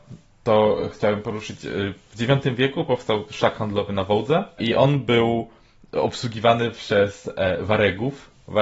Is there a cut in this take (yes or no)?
no